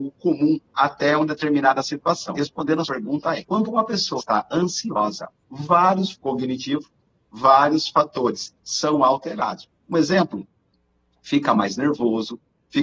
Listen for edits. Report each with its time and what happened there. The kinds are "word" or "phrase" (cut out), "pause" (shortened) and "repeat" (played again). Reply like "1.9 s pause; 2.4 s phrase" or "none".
2.4 s word; 2.9 s word; 3.4 s word; 4.2 s word; 6.1 s word; 8.6 s word